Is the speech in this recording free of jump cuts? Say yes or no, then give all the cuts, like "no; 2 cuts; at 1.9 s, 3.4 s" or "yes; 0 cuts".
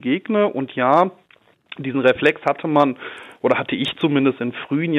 yes; 0 cuts